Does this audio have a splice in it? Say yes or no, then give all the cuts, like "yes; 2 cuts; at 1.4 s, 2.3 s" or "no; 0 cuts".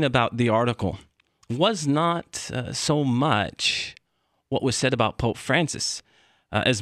no; 0 cuts